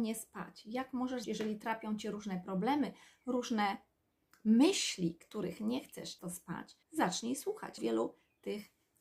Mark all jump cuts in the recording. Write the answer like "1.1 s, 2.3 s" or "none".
1.2 s, 6.2 s, 6.8 s, 7.8 s